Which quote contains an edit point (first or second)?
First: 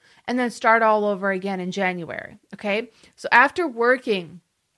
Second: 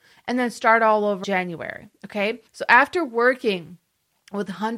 second